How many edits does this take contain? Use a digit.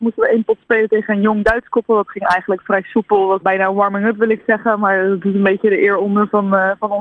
1